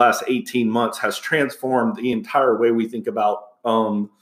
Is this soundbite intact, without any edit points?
yes; 0 cuts

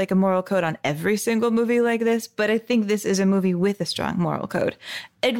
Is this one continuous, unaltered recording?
yes; 0 cuts

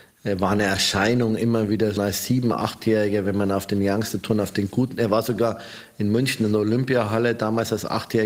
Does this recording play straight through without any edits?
no; 1 cut; at 2.0 s

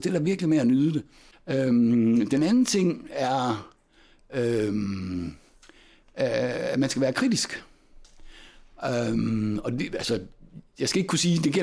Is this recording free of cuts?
yes; 0 cuts

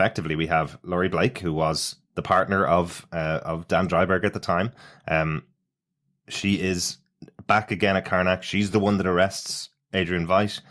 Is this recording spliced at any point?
no; 0 cuts

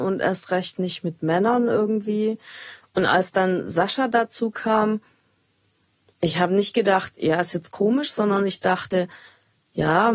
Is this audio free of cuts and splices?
yes; 0 cuts

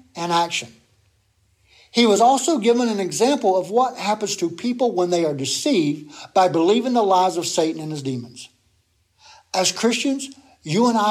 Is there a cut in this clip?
no; 0 cuts

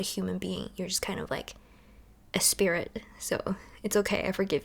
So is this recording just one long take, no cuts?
no; 1 cut; at 2.3 s

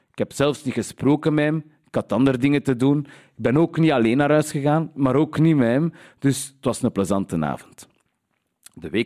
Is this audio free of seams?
yes; 0 cuts

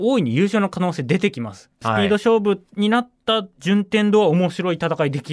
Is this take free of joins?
no; 1 cut; at 2.7 s

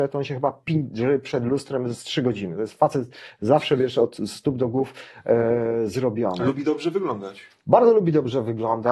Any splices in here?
no; 0 cuts

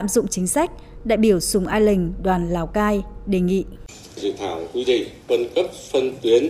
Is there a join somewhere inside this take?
no; 0 cuts

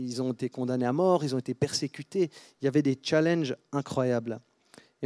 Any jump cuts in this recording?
no; 0 cuts

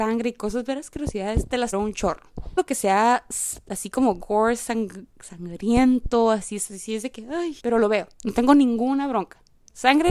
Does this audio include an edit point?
yes; 4 cuts; at 1.7 s, 2.6 s, 7.6 s, 8.1 s

